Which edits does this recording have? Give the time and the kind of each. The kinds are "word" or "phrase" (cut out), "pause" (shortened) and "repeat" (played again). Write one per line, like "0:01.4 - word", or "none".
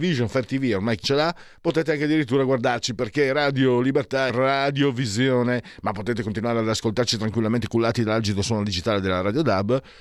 0:01.0 - word
0:04.3 - word